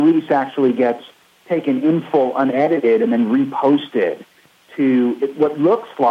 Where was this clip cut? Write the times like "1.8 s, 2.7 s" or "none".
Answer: none